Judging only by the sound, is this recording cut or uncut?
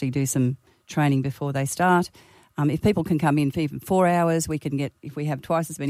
uncut